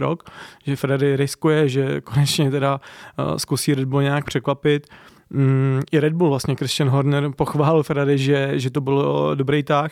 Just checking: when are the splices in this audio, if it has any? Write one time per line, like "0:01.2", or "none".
none

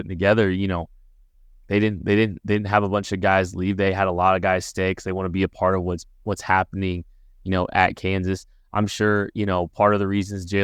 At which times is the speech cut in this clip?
none

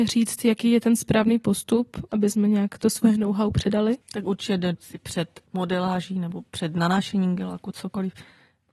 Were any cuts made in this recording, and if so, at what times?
0:04.0
0:04.7
0:05.5

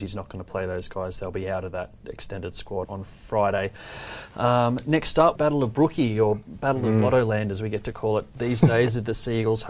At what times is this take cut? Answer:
0:02.8
0:05.4

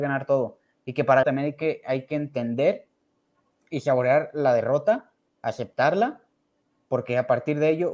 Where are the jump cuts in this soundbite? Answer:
0:01.2

